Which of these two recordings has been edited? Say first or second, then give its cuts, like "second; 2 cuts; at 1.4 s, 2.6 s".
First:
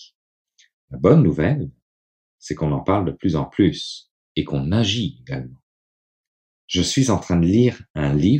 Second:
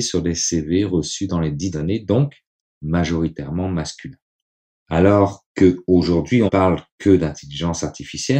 second; 2 cuts; at 1.7 s, 6.5 s